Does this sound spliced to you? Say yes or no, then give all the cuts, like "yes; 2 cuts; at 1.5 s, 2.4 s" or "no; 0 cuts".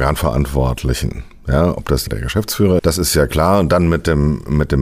yes; 2 cuts; at 2.1 s, 2.8 s